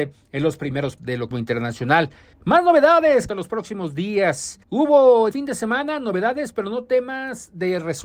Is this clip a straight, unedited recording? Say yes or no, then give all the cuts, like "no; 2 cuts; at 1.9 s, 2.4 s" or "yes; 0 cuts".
no; 6 cuts; at 1.0 s, 1.3 s, 2.3 s, 3.3 s, 4.6 s, 5.3 s